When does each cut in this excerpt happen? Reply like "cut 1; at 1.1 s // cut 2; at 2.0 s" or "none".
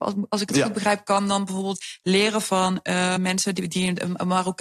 cut 1; at 3.2 s